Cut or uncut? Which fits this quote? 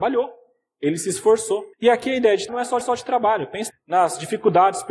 cut